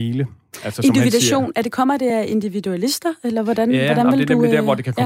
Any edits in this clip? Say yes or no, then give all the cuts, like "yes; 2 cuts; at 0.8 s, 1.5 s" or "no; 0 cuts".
no; 0 cuts